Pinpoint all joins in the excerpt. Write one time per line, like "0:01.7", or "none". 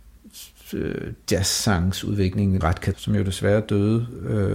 0:02.6
0:02.9